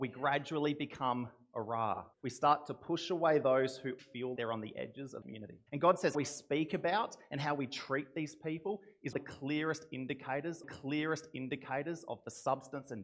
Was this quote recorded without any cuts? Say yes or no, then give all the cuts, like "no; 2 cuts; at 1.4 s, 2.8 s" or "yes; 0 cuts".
no; 8 cuts; at 2.1 s, 4.0 s, 4.4 s, 5.2 s, 5.7 s, 6.1 s, 9.1 s, 10.6 s